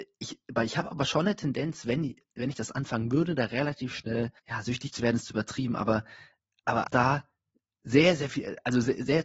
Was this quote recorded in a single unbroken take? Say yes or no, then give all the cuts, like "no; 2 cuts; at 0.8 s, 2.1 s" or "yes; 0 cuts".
no; 2 cuts; at 4.4 s, 6.9 s